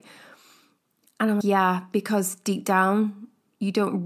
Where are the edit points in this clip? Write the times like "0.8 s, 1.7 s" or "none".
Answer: 1.4 s